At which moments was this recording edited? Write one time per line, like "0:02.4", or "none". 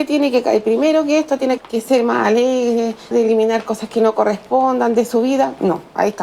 0:01.6
0:03.1